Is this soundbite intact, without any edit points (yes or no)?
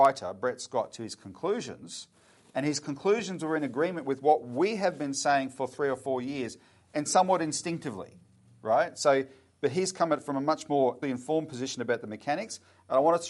no